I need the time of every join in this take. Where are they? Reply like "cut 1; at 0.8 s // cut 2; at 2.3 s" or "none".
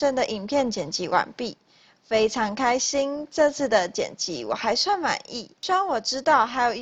none